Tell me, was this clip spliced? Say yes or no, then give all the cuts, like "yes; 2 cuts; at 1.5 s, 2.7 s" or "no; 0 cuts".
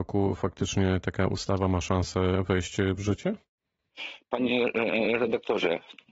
no; 0 cuts